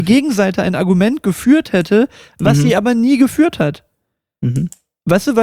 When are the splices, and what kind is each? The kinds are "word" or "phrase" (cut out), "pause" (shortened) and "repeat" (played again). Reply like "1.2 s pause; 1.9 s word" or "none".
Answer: none